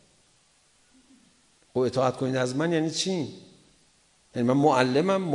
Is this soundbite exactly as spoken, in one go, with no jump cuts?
yes; 0 cuts

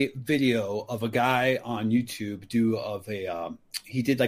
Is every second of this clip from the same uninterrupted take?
yes; 0 cuts

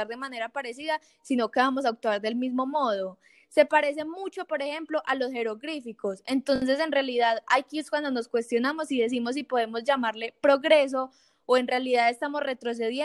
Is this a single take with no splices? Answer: yes; 0 cuts

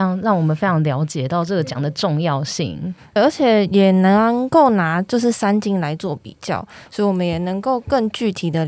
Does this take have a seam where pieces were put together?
yes; 1 cut; at 3.2 s

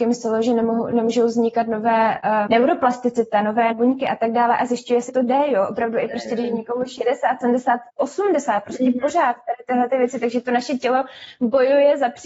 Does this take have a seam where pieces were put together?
yes; 4 cuts; at 2.5 s, 3.7 s, 5.1 s, 7.9 s

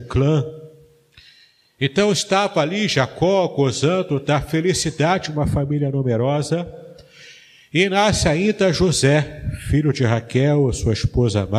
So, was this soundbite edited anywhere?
no; 0 cuts

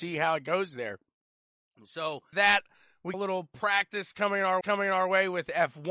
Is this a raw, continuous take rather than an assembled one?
no; 3 cuts; at 2.3 s, 3.1 s, 4.6 s

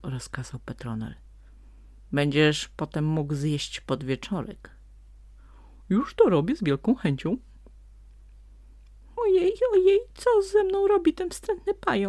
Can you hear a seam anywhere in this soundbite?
no; 0 cuts

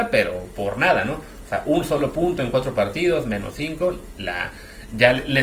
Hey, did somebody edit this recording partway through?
no; 0 cuts

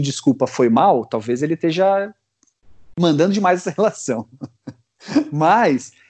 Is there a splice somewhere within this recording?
no; 0 cuts

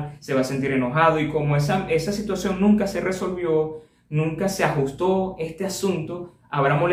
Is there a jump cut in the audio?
no; 0 cuts

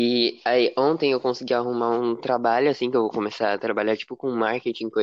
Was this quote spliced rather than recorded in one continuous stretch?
no; 0 cuts

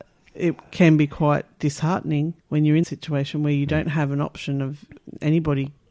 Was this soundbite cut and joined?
yes; 2 cuts; at 2.4 s, 2.8 s

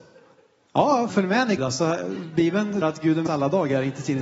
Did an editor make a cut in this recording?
yes; 4 cuts; at 1.1 s, 1.6 s, 2.8 s, 3.3 s

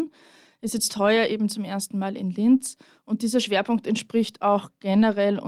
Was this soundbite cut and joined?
no; 0 cuts

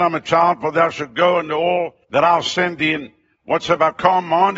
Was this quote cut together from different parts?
yes; 1 cut; at 2.0 s

